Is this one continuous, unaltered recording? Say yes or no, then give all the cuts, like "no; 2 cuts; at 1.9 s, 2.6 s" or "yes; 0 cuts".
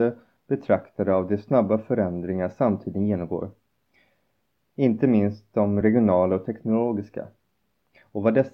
yes; 0 cuts